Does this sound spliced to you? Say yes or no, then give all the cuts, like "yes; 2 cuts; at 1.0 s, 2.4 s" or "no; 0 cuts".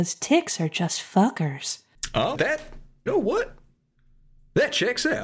yes; 2 cuts; at 2.3 s, 3.1 s